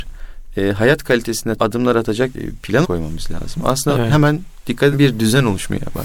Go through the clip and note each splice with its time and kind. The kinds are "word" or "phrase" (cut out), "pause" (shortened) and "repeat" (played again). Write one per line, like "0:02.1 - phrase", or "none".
0:01.6 - word
0:02.3 - word
0:02.8 - word
0:04.9 - word